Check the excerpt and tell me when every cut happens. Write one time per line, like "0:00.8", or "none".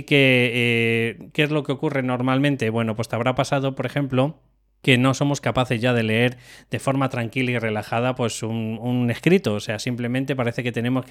none